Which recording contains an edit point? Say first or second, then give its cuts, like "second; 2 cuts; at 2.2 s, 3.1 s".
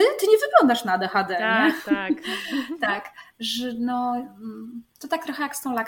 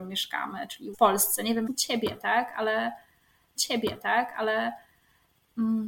second; 3 cuts; at 0.9 s, 1.7 s, 3.6 s